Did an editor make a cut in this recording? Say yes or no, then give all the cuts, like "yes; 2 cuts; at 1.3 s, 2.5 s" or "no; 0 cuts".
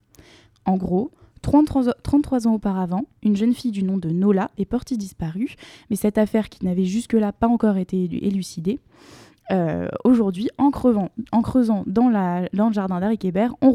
no; 0 cuts